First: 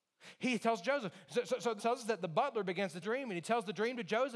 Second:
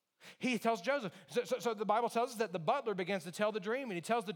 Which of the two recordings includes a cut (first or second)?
first